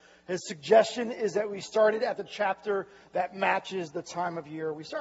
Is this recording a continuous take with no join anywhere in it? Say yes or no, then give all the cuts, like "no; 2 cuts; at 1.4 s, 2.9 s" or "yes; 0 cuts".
yes; 0 cuts